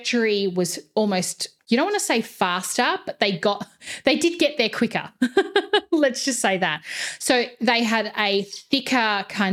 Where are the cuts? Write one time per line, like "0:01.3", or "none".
0:01.6